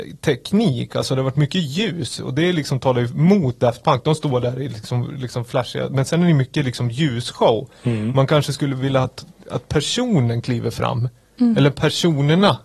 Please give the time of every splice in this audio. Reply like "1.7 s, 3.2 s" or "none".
none